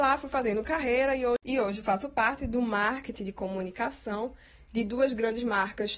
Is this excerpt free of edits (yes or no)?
yes